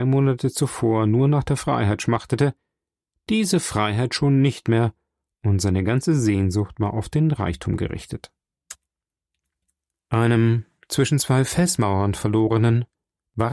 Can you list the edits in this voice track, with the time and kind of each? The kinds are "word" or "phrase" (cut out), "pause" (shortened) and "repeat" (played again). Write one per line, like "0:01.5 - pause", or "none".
none